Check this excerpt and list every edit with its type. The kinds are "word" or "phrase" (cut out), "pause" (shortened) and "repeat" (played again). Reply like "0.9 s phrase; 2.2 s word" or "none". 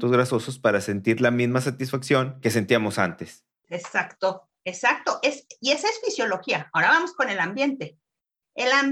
3.5 s pause